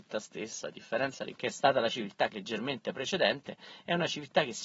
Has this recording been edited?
yes; 2 cuts; at 1.3 s, 2.3 s

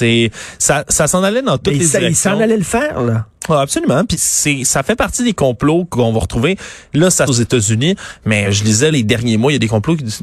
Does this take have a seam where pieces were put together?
yes; 4 cuts; at 4.1 s, 7.3 s, 8.4 s, 8.9 s

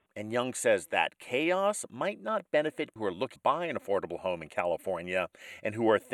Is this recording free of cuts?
no; 2 cuts; at 3.0 s, 3.4 s

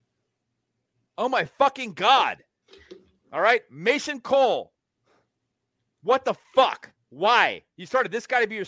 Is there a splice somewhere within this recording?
no; 0 cuts

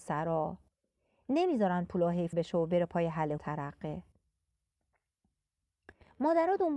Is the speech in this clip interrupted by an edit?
yes; 2 cuts; at 2.3 s, 3.4 s

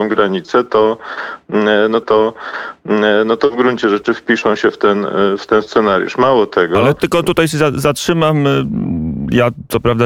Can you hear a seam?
yes; 2 cuts; at 2.0 s, 7.0 s

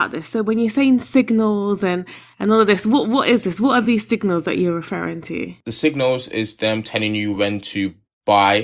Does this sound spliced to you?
no; 0 cuts

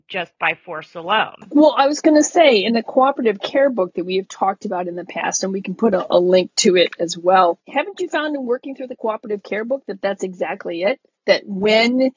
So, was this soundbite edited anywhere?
no; 0 cuts

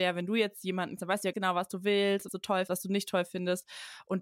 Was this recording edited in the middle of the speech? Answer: yes; 4 cuts; at 1.0 s, 1.3 s, 2.3 s, 2.7 s

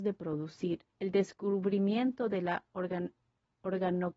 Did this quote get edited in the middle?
yes; 1 cut; at 0.9 s

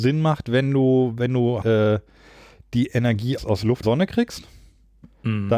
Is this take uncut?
no; 3 cuts; at 1.6 s, 3.4 s, 3.8 s

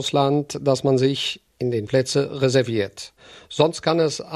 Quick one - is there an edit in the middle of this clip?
yes; 1 cut; at 1.9 s

